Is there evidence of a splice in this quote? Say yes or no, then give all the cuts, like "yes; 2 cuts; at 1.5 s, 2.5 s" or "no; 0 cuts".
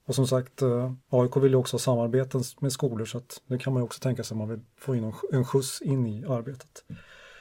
yes; 1 cut; at 1.0 s